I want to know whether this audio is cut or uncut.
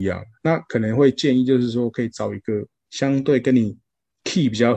uncut